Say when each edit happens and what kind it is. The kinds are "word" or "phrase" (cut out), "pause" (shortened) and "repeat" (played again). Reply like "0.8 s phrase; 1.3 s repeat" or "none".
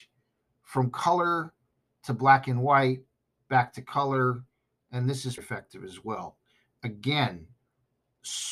5.4 s word